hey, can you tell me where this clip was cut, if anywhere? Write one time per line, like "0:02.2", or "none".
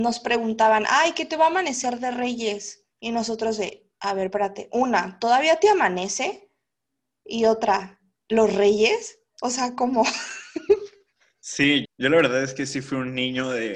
0:02.9
0:09.3
0:11.8